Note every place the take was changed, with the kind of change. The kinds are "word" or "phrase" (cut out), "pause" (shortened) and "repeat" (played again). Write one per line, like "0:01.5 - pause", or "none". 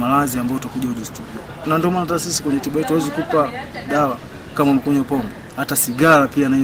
none